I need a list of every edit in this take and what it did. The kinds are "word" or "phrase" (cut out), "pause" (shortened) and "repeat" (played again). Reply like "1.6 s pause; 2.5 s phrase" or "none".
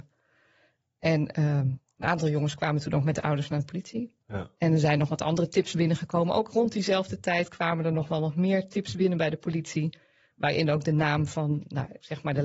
none